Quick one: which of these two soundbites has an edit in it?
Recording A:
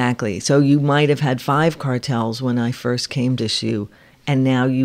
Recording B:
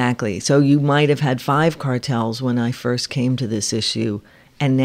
A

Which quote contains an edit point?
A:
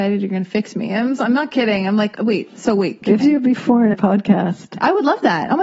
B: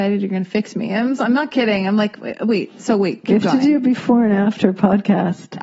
A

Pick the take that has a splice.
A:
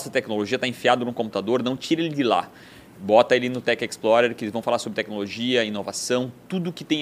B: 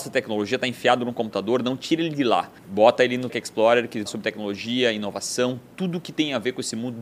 B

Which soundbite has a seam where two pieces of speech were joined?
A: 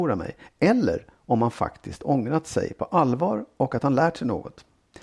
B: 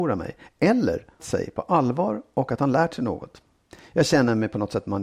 B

